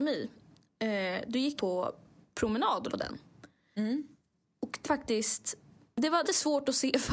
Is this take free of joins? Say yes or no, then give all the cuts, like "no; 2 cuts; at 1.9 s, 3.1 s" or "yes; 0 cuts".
no; 4 cuts; at 1.6 s, 2.9 s, 4.8 s, 6.2 s